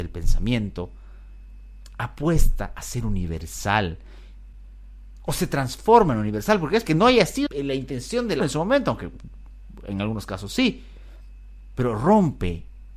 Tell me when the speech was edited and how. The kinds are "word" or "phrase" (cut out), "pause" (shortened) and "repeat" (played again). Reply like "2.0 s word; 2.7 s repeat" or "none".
6.9 s word; 7.5 s word; 8.4 s word